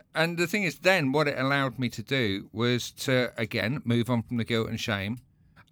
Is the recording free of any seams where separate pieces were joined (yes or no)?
yes